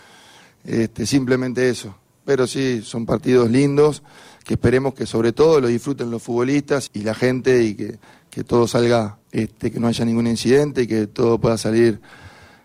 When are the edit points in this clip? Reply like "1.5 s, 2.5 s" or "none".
6.9 s, 9.2 s